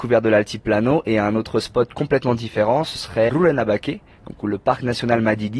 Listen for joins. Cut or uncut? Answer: cut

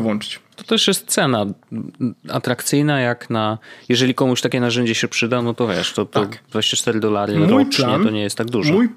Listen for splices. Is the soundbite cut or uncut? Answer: uncut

